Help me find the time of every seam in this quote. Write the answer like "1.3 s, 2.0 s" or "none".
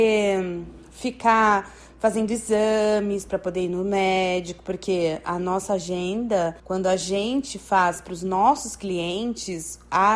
6.6 s